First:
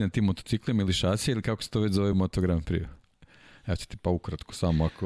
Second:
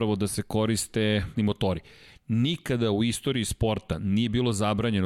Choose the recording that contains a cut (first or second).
second